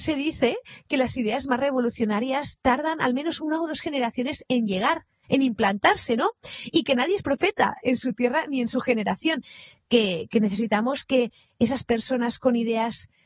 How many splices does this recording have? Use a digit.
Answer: 2